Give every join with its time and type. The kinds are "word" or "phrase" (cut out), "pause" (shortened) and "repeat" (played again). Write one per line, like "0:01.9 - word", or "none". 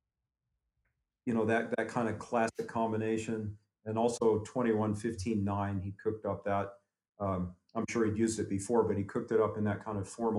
none